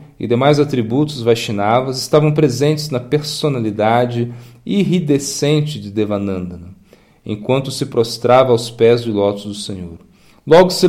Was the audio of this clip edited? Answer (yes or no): no